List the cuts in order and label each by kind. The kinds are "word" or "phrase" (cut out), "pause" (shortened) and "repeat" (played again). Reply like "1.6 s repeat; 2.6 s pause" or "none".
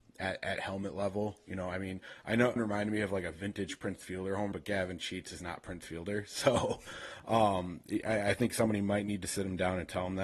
2.6 s phrase; 4.5 s word